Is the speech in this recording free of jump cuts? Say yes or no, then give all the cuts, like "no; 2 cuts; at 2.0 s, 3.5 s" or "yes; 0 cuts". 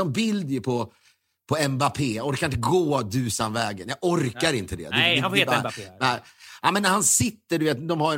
yes; 0 cuts